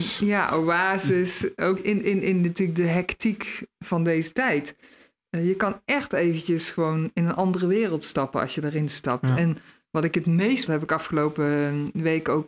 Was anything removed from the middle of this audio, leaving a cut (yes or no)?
yes